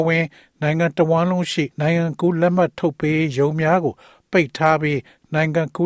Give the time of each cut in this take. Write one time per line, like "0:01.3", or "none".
0:01.7